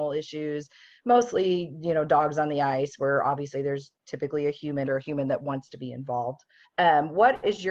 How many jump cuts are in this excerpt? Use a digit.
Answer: 2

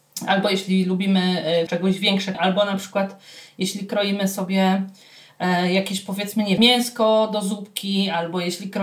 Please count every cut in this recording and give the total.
3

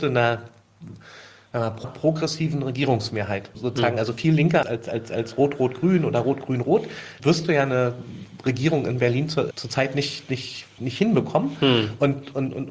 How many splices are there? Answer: 6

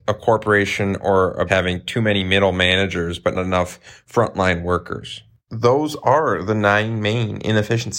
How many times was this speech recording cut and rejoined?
2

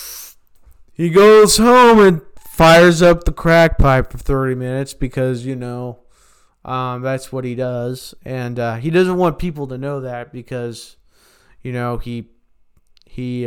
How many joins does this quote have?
0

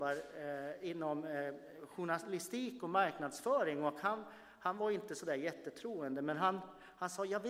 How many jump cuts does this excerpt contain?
0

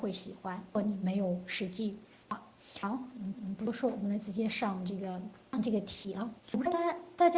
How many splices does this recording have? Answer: 2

